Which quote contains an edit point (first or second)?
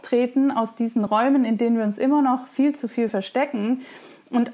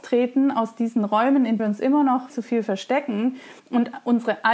second